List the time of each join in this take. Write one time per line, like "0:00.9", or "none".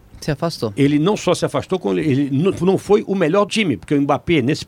0:02.5
0:03.5